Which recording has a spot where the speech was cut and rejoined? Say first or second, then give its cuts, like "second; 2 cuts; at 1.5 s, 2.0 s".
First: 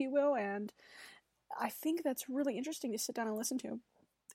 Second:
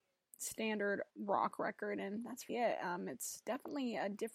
second; 2 cuts; at 1.1 s, 2.5 s